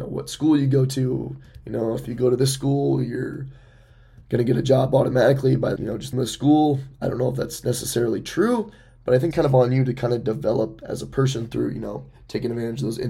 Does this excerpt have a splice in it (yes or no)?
yes